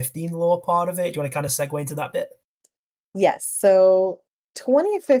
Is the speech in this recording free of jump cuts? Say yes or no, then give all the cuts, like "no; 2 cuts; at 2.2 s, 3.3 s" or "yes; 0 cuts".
yes; 0 cuts